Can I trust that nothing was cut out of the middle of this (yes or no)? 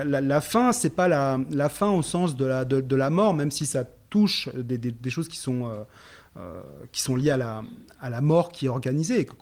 yes